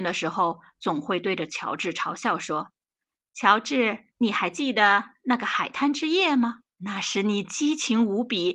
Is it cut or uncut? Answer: cut